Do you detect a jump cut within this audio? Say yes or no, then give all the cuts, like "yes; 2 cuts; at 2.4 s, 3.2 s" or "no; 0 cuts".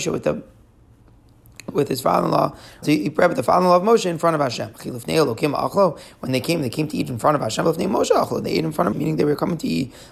yes; 3 cuts; at 1.7 s, 2.8 s, 8.9 s